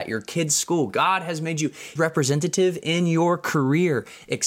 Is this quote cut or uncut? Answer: cut